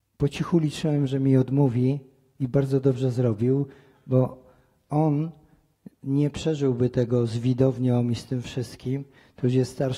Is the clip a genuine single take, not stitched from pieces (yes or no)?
yes